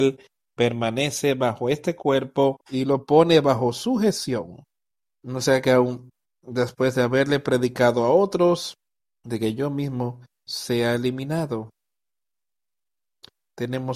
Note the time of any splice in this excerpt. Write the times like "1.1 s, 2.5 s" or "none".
2.6 s, 4.9 s, 6.3 s, 9.0 s